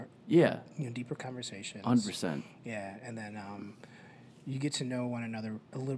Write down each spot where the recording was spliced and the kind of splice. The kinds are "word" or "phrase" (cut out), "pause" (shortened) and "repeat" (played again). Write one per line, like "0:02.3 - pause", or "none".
none